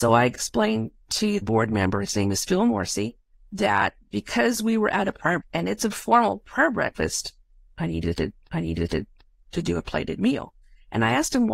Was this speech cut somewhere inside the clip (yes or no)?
yes